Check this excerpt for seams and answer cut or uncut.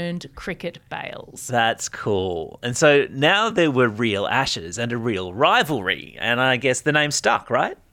uncut